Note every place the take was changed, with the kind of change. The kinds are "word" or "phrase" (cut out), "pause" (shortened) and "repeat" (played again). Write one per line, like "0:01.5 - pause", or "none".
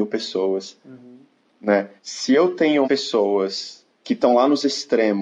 0:02.0 - pause
0:02.8 - word
0:03.9 - pause